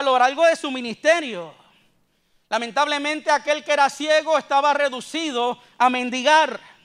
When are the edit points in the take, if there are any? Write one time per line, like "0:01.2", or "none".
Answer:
none